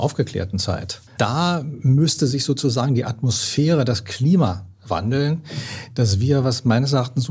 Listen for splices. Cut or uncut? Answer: cut